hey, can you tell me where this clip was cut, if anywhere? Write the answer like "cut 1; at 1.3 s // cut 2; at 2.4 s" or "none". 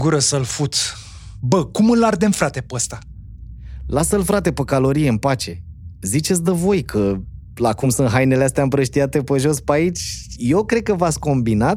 none